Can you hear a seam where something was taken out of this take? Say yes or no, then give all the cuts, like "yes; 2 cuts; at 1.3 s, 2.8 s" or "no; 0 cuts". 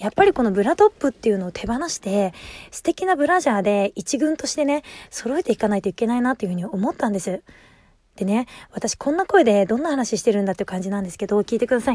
no; 0 cuts